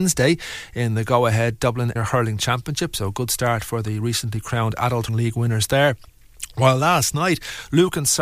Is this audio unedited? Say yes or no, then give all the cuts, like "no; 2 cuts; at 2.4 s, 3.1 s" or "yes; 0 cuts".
no; 2 cuts; at 2.0 s, 5.1 s